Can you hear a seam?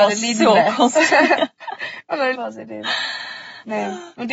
yes; 1 cut; at 2.3 s

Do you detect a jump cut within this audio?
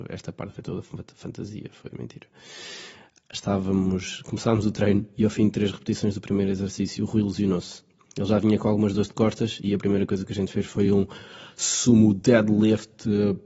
no; 0 cuts

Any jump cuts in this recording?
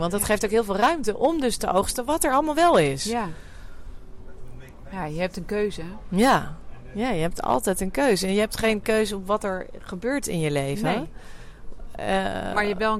no; 0 cuts

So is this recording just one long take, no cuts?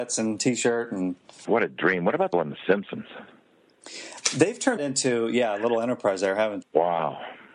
no; 4 cuts; at 1.4 s, 2.3 s, 4.8 s, 6.6 s

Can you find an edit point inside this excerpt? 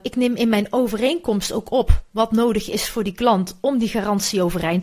no; 0 cuts

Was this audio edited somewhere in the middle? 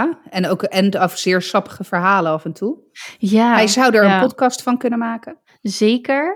no; 0 cuts

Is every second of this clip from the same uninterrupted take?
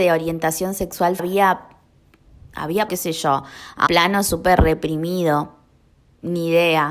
no; 3 cuts; at 1.2 s, 2.9 s, 3.9 s

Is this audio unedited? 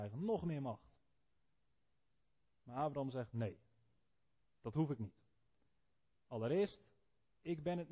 yes; 0 cuts

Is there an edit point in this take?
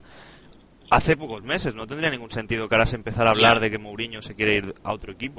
no; 0 cuts

